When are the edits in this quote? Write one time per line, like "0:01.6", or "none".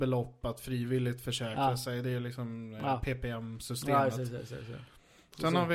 none